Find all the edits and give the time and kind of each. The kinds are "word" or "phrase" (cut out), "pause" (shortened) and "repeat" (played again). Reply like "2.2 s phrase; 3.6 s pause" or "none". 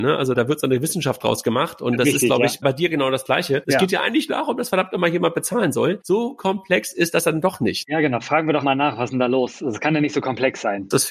4.3 s word; 8.6 s word